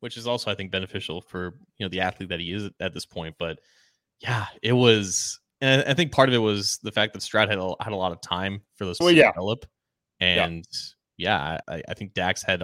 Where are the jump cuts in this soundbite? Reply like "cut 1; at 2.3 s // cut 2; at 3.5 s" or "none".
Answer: cut 1; at 9.0 s // cut 2; at 11.6 s